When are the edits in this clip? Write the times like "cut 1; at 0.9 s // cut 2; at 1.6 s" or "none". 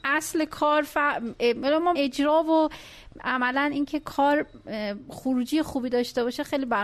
cut 1; at 2.0 s